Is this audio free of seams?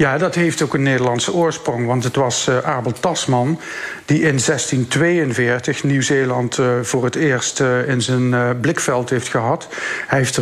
yes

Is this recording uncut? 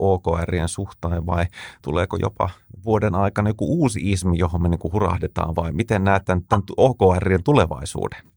yes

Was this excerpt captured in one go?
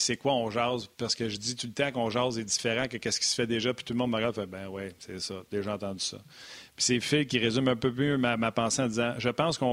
yes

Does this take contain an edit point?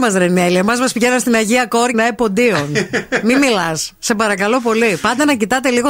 yes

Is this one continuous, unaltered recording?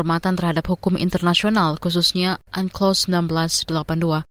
yes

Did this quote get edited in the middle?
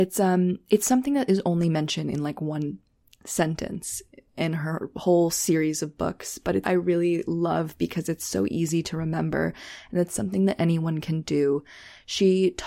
yes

